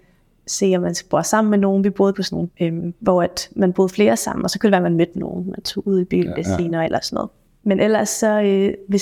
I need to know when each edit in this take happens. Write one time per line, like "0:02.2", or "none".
0:02.1
0:02.5